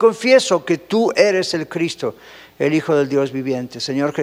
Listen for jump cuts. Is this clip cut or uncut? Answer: uncut